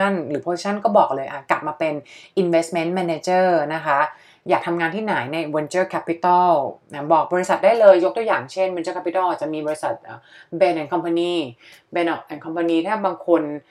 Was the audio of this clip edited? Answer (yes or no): no